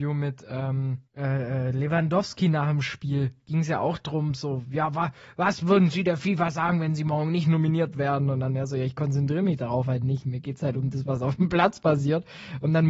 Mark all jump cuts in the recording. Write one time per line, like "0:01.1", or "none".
0:01.0